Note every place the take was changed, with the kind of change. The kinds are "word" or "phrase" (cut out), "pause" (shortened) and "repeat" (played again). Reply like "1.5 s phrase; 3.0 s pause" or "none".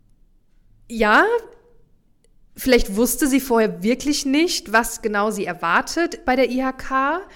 none